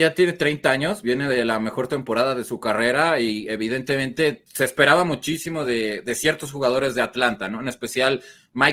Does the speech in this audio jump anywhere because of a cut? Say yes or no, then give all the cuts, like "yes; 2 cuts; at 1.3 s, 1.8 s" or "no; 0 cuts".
no; 0 cuts